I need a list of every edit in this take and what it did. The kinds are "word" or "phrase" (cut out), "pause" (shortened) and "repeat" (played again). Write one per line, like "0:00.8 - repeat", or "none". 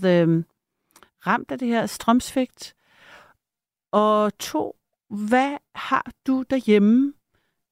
none